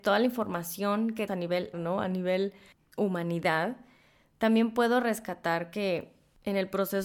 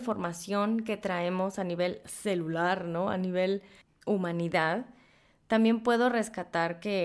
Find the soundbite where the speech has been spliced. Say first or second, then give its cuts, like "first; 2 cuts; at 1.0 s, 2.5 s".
first; 2 cuts; at 1.3 s, 1.7 s